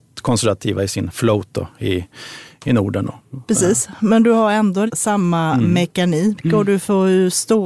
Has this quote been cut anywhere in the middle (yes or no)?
yes